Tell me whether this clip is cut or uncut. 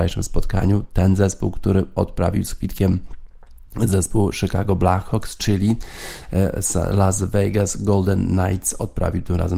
uncut